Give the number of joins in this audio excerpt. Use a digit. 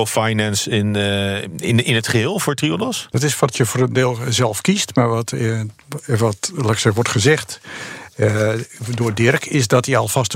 0